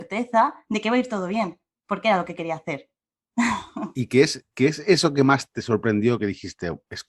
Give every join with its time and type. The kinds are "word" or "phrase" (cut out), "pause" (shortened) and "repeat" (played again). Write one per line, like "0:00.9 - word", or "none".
none